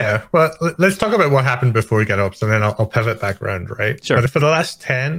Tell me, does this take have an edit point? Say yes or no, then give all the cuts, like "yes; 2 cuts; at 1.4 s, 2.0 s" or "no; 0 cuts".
no; 0 cuts